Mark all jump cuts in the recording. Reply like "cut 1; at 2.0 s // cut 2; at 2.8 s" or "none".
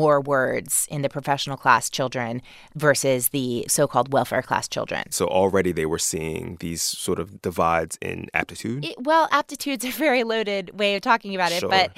none